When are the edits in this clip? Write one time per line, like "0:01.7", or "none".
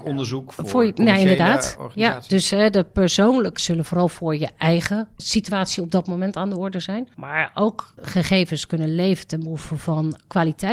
0:03.6
0:05.2
0:08.0